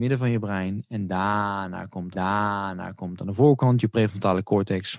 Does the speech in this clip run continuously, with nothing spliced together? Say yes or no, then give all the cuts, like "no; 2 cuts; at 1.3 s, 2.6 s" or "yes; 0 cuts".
no; 1 cut; at 2.1 s